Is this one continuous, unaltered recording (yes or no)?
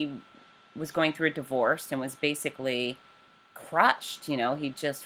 yes